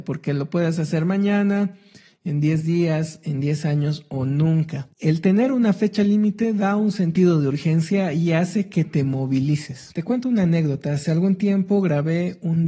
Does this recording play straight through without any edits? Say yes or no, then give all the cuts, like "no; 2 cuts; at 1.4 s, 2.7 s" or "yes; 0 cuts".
yes; 0 cuts